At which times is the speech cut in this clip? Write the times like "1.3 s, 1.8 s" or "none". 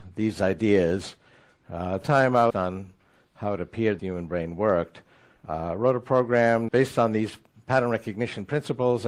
2.0 s, 2.5 s, 4.0 s, 5.4 s, 6.7 s